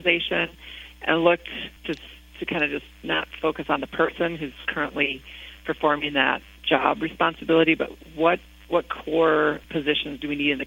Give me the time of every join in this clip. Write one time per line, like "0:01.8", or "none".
0:01.8
0:08.4
0:09.6

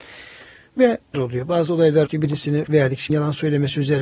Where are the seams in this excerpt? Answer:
0:01.1
0:02.1
0:02.6
0:03.1

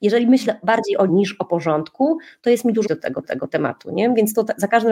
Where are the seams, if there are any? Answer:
0:01.1
0:02.9
0:03.2

